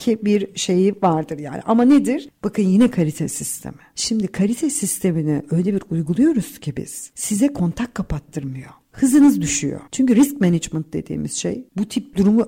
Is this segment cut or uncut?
cut